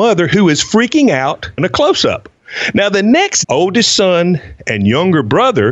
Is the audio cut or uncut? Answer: cut